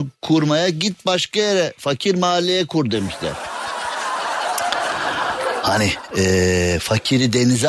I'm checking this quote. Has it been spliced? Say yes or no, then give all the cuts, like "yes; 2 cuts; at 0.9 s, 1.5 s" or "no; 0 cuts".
no; 0 cuts